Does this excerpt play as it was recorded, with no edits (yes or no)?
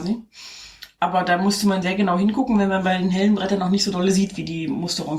no